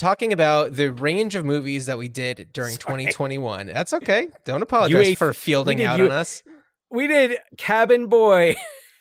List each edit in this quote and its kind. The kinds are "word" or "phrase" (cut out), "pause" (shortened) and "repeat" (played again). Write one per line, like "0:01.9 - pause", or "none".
0:05.1 - word